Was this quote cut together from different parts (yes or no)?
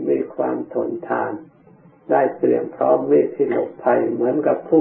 no